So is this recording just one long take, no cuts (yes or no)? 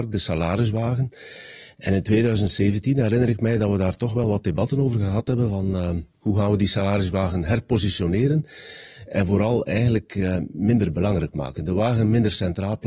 yes